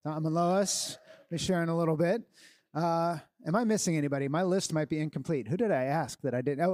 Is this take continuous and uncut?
yes; 0 cuts

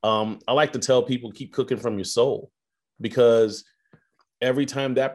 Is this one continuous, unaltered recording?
yes; 0 cuts

